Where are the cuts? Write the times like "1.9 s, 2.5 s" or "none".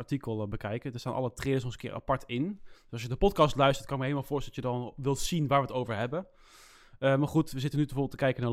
none